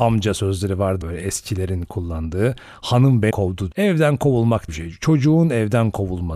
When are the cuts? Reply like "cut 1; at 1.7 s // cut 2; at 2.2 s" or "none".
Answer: cut 1; at 1.0 s // cut 2; at 3.3 s // cut 3; at 3.7 s // cut 4; at 4.7 s